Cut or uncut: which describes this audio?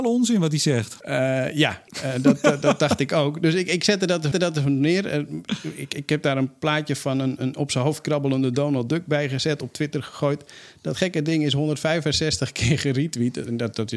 cut